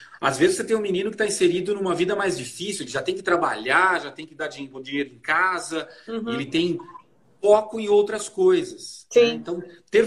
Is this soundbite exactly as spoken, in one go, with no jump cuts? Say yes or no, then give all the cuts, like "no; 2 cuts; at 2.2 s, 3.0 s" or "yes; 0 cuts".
yes; 0 cuts